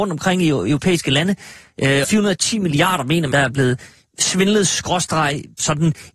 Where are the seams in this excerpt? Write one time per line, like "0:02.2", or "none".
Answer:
0:02.0
0:03.3